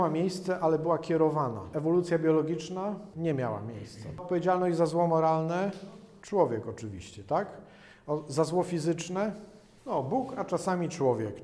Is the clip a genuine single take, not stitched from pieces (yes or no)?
yes